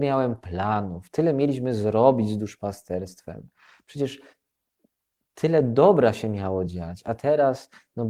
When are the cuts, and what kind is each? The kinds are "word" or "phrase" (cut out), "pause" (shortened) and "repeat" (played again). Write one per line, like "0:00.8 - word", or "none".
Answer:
none